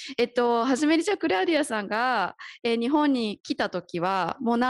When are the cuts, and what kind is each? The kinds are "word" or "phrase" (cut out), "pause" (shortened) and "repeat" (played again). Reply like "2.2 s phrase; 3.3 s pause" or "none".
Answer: none